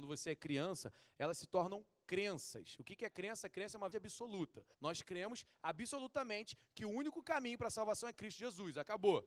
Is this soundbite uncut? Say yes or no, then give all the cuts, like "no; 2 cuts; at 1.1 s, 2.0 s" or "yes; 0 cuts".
no; 2 cuts; at 3.9 s, 4.7 s